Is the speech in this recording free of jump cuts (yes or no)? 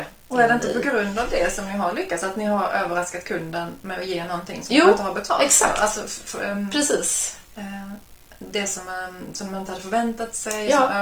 yes